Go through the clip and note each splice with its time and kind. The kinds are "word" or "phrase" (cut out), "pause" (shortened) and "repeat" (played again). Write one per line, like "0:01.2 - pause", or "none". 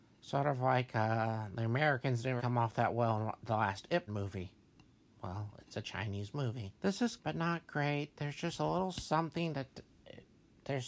0:02.4 - word
0:04.1 - word
0:06.7 - pause
0:07.2 - word